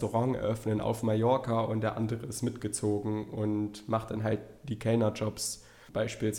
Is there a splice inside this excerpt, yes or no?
no